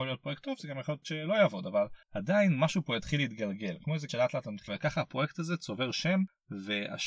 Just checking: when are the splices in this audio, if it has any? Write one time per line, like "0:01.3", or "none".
0:01.0
0:02.0
0:04.1
0:04.7